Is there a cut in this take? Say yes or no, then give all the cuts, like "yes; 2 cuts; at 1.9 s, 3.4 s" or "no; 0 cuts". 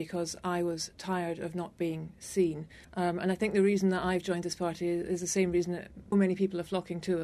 yes; 2 cuts; at 2.8 s, 6.1 s